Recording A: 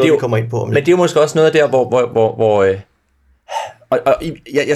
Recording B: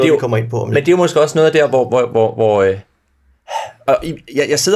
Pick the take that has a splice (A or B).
B